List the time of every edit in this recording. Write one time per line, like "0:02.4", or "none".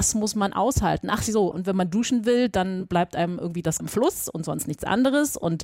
0:01.5
0:03.8